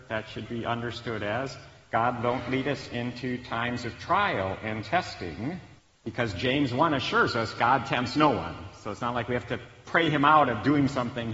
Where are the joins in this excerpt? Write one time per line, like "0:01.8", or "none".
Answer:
0:05.8